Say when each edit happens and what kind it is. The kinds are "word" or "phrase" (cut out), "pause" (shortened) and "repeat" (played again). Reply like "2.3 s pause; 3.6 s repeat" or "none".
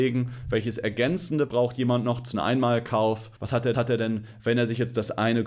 1.5 s word; 2.3 s phrase; 3.4 s pause; 3.7 s repeat

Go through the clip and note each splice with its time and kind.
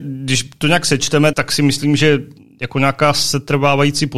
1.3 s word

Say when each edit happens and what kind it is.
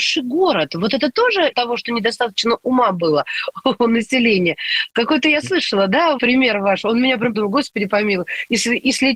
1.5 s word; 6.2 s word; 7.3 s word

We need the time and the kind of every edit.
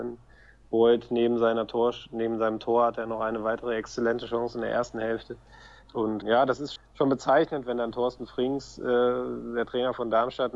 6.2 s word; 6.8 s word

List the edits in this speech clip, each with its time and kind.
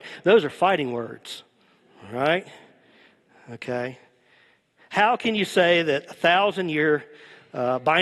none

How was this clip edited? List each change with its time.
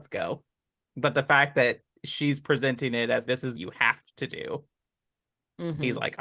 3.3 s word; 3.6 s word

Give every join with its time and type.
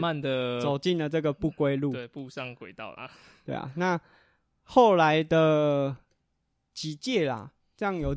none

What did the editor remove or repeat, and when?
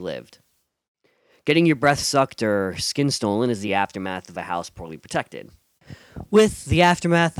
none

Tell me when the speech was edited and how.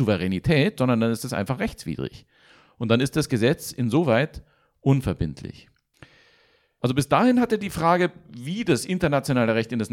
none

